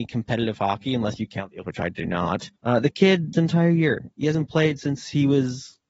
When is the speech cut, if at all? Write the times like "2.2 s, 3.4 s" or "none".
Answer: 1.6 s, 2.6 s, 3.3 s, 4.1 s